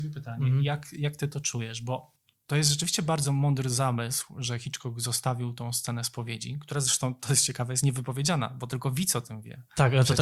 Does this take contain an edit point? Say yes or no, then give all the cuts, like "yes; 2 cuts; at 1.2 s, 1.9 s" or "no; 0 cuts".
no; 0 cuts